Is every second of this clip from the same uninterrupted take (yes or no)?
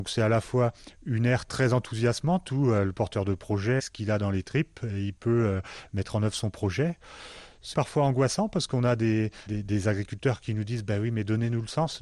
no